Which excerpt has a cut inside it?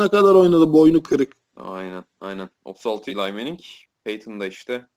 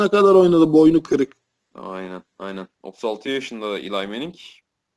first; 3 cuts; at 1.5 s, 3.1 s, 3.9 s

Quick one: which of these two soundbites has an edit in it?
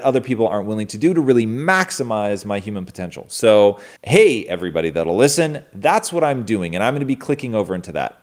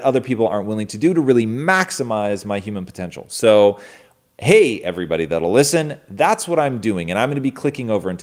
first; 1 cut; at 4.0 s

